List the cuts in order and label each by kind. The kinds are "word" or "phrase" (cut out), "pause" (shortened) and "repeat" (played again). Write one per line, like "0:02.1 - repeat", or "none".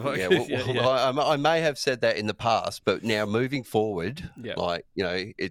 none

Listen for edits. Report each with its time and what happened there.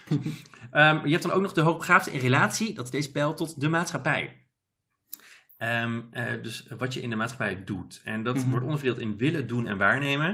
none

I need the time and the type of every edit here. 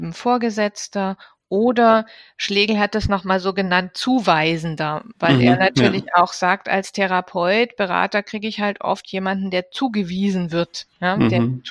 none

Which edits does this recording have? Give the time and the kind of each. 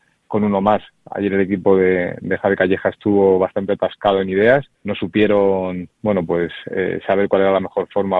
0:04.7 - pause

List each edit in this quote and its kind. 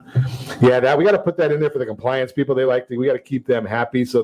none

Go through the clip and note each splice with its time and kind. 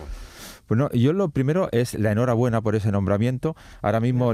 none

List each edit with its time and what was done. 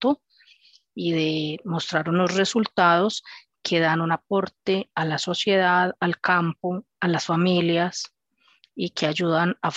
none

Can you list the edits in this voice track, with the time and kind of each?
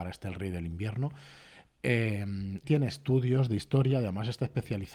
0:02.6 - word

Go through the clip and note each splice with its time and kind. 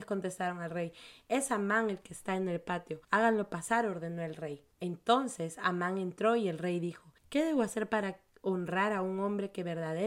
0:03.0 - pause
0:04.7 - pause
0:07.2 - pause

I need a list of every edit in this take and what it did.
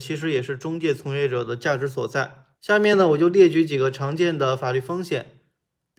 0:02.5 - pause

